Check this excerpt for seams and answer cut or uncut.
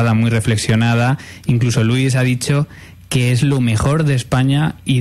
uncut